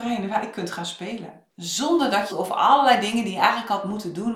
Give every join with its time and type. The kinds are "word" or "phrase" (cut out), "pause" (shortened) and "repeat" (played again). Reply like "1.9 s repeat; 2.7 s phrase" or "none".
1.5 s pause; 2.3 s phrase

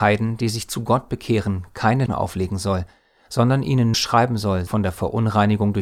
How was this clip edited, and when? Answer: 2.1 s word; 3.9 s word; 4.7 s word

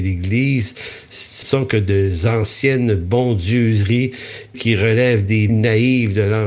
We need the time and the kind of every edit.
1.4 s word; 4.5 s word; 5.5 s word

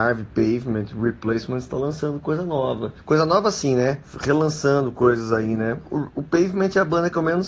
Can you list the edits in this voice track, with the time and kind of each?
3.0 s pause

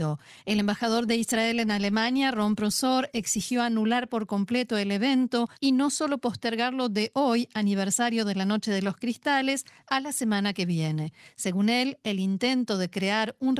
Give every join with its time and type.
5.6 s pause

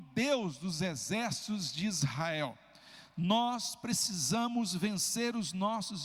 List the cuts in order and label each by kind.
none

